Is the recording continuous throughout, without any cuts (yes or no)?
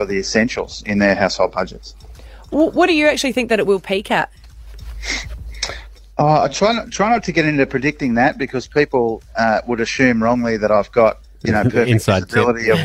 yes